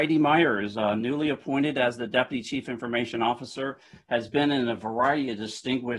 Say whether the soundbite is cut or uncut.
uncut